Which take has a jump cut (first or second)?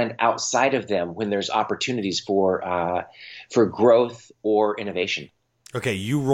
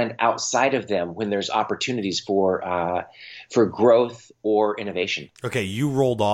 second